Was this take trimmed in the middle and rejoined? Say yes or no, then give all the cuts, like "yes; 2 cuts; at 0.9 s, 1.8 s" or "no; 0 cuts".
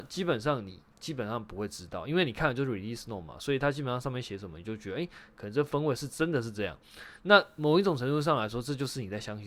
no; 0 cuts